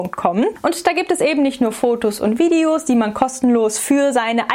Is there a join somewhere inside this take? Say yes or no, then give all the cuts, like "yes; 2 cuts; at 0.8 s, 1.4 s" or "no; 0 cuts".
no; 0 cuts